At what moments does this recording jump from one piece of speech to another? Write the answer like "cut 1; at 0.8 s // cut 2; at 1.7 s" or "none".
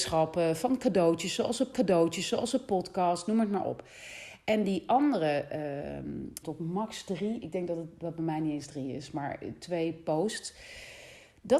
cut 1; at 1.7 s // cut 2; at 6.4 s